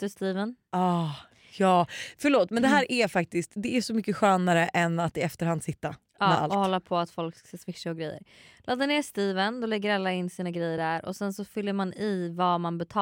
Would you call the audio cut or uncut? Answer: uncut